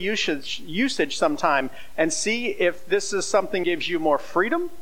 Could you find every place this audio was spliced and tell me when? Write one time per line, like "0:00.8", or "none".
0:03.6